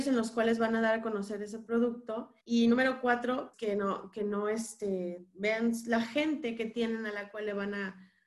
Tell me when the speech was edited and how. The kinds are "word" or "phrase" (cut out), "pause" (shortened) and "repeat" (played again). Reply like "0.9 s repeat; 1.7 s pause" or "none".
2.4 s pause; 3.5 s word

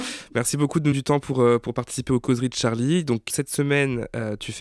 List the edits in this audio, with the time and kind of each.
0.9 s word; 3.3 s word

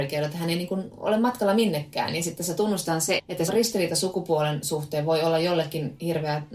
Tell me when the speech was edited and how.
3.2 s word; 3.5 s word

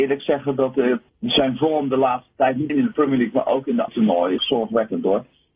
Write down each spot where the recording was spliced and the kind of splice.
1.1 s pause; 2.7 s word; 3.9 s word; 4.4 s phrase

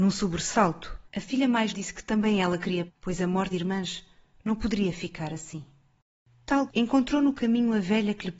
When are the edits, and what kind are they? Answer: 1.1 s pause; 1.7 s word; 2.9 s word; 3.5 s word; 6.7 s phrase

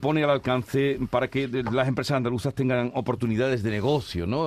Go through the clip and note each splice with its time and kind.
none

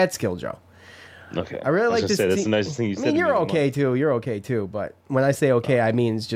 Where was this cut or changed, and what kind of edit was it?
none

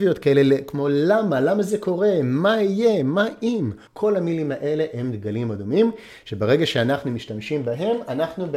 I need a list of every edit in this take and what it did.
3.9 s pause

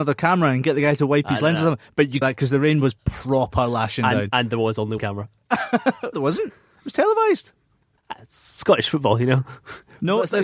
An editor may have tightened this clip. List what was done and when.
2.2 s phrase; 5.0 s word; 6.1 s word

